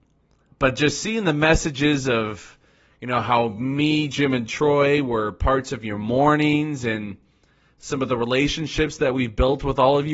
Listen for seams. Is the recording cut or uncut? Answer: uncut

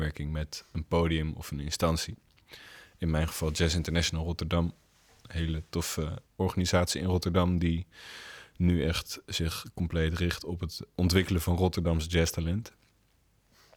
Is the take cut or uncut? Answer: cut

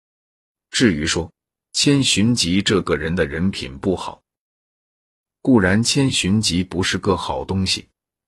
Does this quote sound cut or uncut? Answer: cut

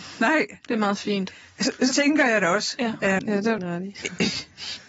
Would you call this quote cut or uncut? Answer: cut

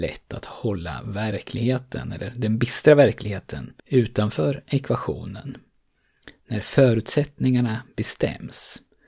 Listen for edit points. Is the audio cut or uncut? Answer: cut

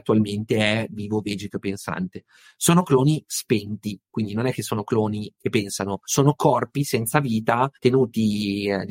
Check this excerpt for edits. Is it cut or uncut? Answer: cut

